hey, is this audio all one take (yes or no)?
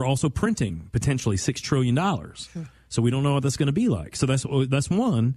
yes